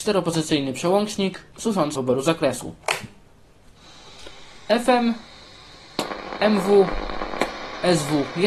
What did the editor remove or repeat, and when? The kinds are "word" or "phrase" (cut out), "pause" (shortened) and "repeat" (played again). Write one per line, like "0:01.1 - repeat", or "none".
0:02.0 - word